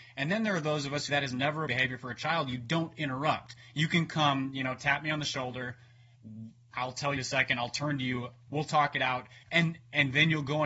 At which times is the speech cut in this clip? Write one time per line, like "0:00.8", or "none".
0:01.1
0:01.7
0:07.2
0:09.4